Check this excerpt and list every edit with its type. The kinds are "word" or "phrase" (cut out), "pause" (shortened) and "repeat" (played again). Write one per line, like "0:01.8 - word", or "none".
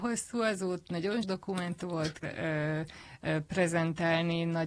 0:01.2 - word
0:02.2 - word